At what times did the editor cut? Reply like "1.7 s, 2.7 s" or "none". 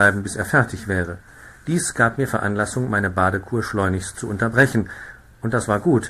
none